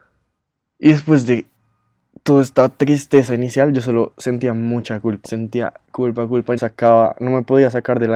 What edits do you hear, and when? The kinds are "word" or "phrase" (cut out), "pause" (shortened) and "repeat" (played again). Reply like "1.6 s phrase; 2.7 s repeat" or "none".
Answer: 5.2 s word; 5.9 s word; 6.6 s word